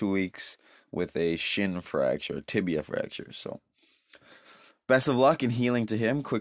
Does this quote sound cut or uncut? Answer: uncut